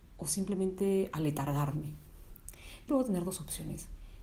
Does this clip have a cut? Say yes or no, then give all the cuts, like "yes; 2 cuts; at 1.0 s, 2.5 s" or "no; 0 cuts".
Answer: yes; 1 cut; at 2.9 s